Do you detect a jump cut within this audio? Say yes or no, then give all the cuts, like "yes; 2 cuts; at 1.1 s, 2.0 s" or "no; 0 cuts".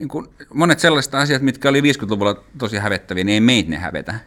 no; 0 cuts